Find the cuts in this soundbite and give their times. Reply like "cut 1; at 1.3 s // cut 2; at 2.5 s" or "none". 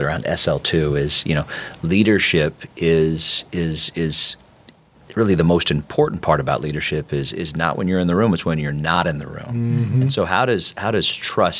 none